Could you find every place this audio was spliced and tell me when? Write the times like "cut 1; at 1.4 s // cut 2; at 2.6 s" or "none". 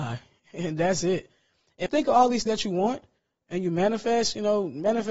cut 1; at 1.9 s // cut 2; at 2.5 s